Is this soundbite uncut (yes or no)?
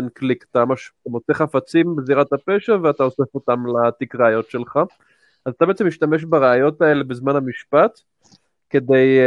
yes